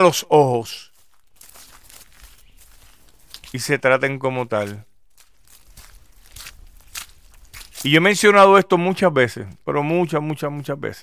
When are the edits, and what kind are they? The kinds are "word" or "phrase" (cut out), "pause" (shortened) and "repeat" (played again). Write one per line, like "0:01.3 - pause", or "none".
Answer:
0:07.7 - pause